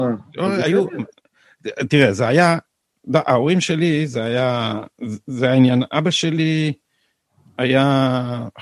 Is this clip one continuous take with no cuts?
yes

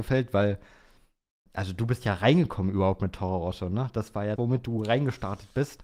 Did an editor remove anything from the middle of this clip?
yes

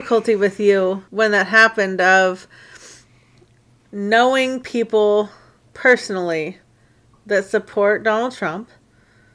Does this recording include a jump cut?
yes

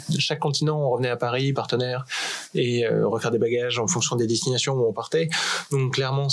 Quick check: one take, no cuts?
no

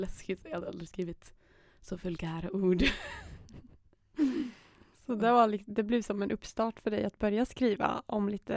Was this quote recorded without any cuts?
yes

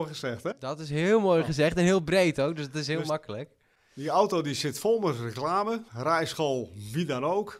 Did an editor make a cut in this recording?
yes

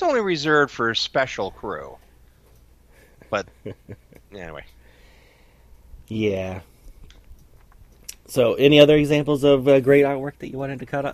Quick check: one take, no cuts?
yes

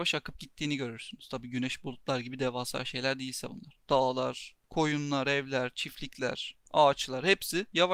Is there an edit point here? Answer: no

